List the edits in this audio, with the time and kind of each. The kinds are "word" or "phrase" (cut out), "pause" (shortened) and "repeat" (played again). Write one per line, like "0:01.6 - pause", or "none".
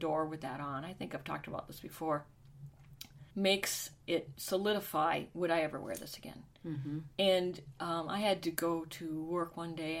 0:03.3 - pause